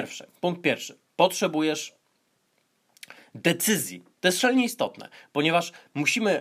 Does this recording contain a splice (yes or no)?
no